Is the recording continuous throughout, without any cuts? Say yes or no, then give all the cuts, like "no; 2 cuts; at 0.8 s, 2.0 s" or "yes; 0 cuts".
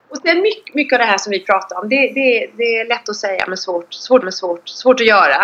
no; 1 cut; at 4.2 s